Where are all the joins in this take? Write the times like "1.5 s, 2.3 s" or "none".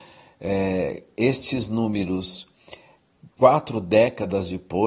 3.3 s